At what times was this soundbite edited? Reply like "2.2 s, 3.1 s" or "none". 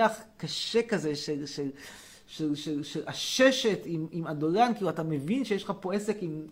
none